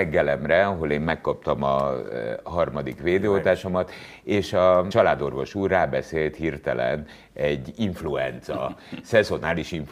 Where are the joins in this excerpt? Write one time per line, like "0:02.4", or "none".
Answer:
none